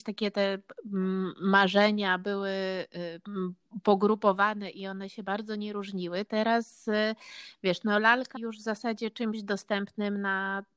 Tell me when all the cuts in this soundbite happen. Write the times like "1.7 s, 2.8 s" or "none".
6.3 s, 8.4 s